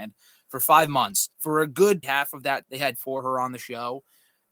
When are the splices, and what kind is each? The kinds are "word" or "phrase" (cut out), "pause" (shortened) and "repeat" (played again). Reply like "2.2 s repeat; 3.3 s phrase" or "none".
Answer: 1.3 s pause; 2.0 s word; 2.6 s word; 2.9 s word